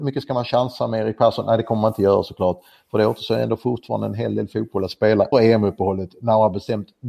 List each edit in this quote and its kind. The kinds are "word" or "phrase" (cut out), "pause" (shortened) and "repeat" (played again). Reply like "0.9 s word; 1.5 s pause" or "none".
5.3 s word